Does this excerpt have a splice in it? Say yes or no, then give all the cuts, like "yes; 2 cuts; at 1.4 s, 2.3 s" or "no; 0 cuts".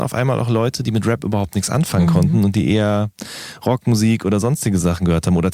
no; 0 cuts